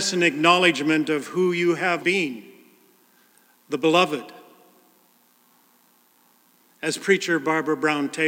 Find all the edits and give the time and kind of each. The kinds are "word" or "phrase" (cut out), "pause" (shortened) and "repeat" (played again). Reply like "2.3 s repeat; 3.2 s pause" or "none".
2.0 s word